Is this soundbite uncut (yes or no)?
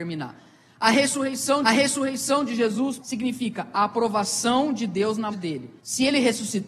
no